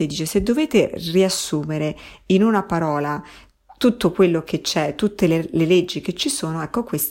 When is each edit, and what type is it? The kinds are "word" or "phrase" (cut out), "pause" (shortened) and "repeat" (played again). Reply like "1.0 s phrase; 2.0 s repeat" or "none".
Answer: none